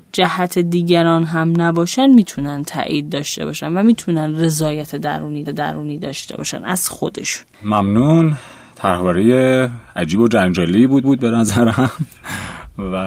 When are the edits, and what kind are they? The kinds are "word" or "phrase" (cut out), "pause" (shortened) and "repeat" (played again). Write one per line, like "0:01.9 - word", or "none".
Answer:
0:05.4 - repeat
0:07.5 - pause
0:11.0 - repeat